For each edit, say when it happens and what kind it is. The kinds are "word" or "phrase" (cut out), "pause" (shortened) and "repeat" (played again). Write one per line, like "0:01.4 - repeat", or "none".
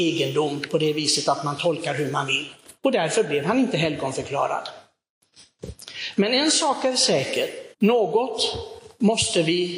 0:02.8 - pause
0:07.7 - pause